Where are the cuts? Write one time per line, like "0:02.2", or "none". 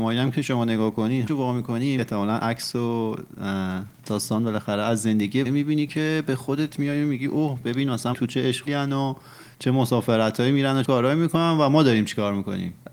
0:01.3
0:02.0
0:03.9
0:05.4
0:08.1
0:08.7
0:10.8